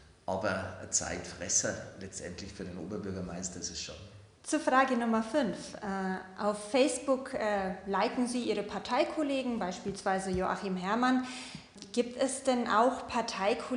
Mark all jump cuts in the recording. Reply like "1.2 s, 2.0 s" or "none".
4.3 s